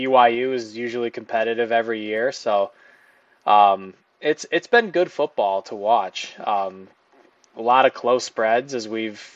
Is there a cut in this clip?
no; 0 cuts

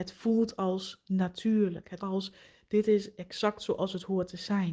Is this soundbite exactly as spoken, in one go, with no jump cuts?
no; 1 cut; at 2.0 s

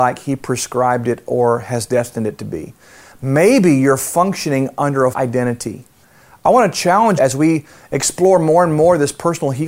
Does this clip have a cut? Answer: yes; 2 cuts; at 5.1 s, 7.2 s

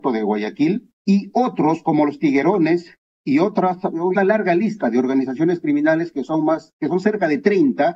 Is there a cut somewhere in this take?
yes; 2 cuts; at 1.0 s, 4.1 s

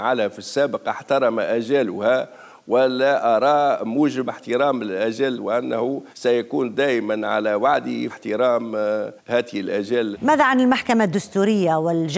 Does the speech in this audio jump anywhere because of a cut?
yes; 6 cuts; at 4.3 s, 5.3 s, 6.1 s, 8.1 s, 9.2 s, 10.1 s

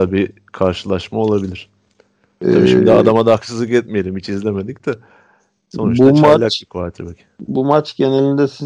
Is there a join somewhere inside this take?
no; 0 cuts

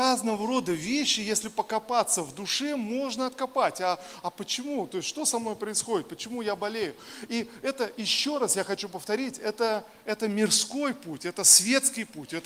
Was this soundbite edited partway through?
no; 0 cuts

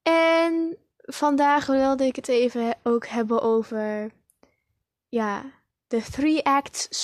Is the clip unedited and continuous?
yes; 0 cuts

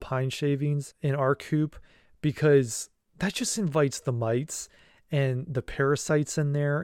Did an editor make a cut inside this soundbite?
no; 0 cuts

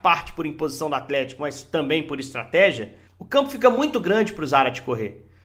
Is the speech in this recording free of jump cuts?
no; 1 cut; at 3.1 s

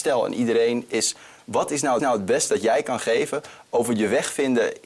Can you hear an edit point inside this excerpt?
yes; 2 cuts; at 2.0 s, 2.5 s

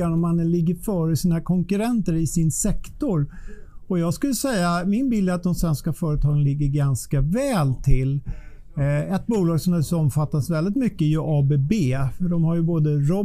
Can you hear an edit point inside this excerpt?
no; 0 cuts

